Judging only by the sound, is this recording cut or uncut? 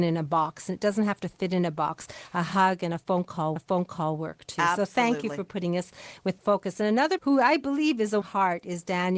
cut